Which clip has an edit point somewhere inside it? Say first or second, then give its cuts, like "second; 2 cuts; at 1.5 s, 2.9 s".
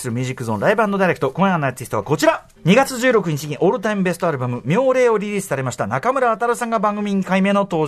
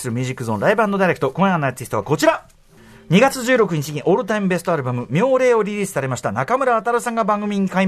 first; 1 cut; at 2.6 s